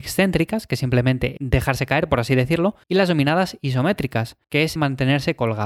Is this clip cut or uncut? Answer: cut